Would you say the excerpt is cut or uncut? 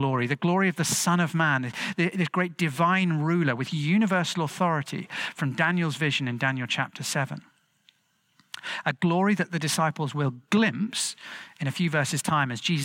uncut